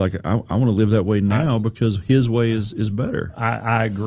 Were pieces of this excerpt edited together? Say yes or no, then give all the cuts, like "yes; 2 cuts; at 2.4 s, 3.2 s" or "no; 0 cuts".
no; 0 cuts